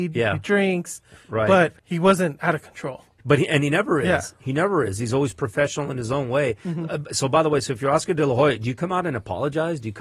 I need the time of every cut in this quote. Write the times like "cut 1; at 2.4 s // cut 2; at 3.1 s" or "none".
cut 1; at 1.8 s // cut 2; at 3.1 s